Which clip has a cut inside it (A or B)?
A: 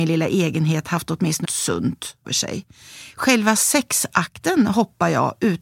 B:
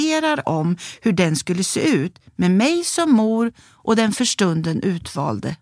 A